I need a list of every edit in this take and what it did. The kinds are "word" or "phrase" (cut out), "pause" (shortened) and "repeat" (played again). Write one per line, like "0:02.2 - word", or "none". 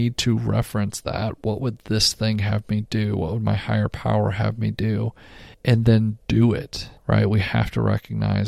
0:05.5 - pause
0:07.0 - pause